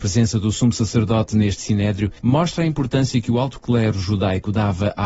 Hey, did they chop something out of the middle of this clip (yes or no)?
yes